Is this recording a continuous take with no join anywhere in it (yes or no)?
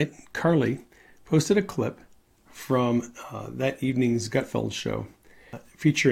yes